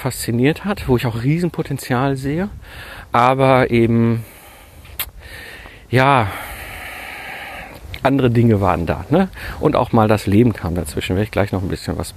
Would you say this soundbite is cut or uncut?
uncut